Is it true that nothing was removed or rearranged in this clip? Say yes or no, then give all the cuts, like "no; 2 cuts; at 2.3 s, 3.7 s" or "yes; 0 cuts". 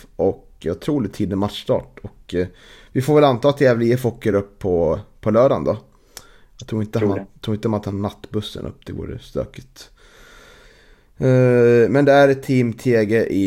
yes; 0 cuts